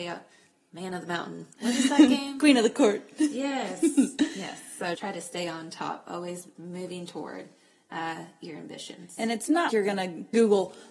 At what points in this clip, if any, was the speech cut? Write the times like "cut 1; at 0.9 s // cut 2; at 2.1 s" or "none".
cut 1; at 5.0 s // cut 2; at 6.6 s // cut 3; at 9.7 s